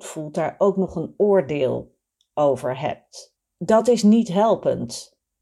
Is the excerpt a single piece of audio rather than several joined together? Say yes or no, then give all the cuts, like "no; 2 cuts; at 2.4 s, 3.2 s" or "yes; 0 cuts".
yes; 0 cuts